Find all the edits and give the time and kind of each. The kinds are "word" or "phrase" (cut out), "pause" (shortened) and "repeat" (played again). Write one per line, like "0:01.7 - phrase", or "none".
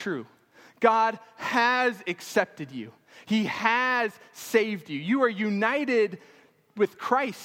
none